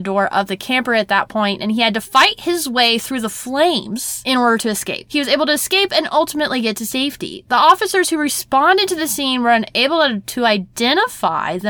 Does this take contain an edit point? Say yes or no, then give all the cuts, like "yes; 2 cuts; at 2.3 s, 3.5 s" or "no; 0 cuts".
no; 0 cuts